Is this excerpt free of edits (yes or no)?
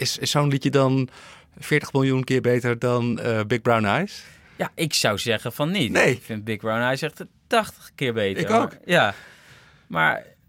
yes